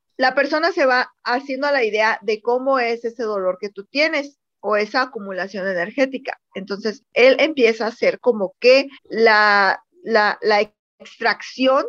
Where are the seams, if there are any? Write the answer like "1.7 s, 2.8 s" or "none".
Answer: 9.0 s